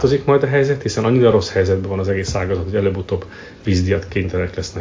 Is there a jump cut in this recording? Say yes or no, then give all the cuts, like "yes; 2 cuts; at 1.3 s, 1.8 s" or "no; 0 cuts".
no; 0 cuts